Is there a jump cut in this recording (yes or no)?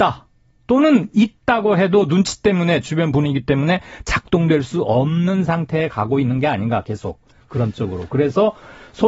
no